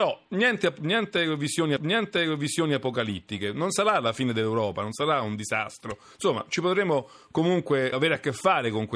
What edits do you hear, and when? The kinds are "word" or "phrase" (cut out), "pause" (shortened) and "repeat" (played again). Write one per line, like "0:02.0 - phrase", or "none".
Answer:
0:01.8 - repeat
0:07.9 - word

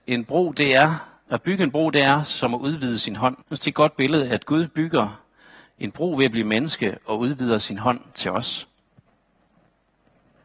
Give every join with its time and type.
0:03.4 - pause

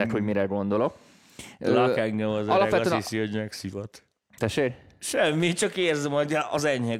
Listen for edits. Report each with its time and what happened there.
none

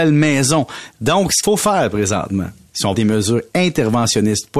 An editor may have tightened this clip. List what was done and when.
0:01.4 - word
0:02.9 - word

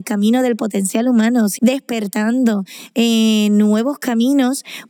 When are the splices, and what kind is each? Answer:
0:01.6 - word

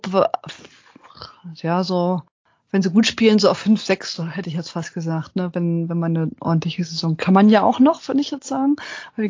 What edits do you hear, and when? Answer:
none

